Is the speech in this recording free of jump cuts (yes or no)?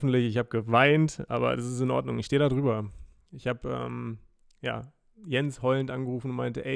yes